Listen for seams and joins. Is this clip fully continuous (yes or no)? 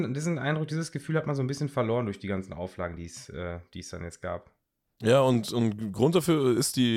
yes